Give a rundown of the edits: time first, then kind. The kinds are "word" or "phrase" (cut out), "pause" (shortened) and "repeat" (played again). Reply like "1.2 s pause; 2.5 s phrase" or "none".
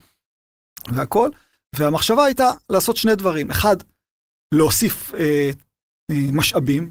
none